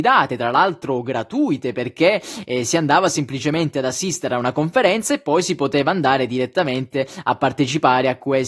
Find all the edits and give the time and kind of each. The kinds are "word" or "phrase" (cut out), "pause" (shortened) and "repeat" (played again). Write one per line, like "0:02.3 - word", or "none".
none